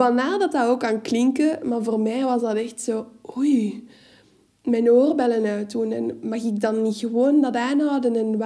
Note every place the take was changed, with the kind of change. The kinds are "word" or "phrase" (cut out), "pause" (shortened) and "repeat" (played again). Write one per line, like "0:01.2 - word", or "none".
none